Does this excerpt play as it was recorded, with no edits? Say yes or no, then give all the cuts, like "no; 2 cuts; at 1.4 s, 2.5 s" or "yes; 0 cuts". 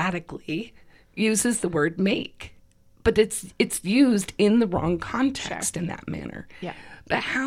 yes; 0 cuts